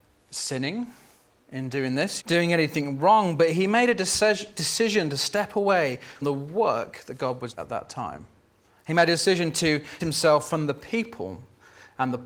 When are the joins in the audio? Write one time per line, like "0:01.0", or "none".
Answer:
0:02.2
0:06.2
0:07.5
0:10.0